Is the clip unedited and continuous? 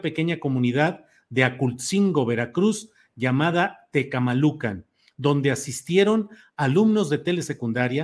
yes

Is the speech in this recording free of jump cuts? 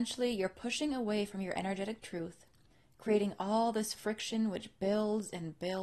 yes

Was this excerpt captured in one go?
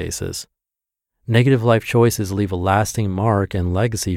yes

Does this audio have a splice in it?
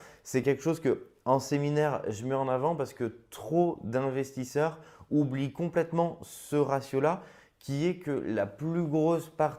no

